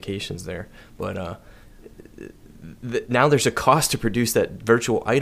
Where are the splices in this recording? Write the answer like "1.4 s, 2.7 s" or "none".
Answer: none